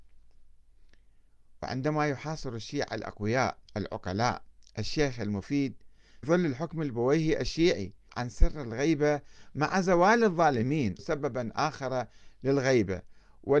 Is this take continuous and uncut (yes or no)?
no